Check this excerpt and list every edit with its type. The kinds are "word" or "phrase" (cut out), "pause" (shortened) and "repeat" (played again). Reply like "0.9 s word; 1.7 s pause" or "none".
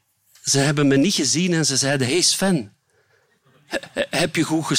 none